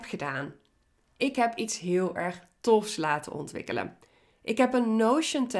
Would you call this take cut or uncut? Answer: uncut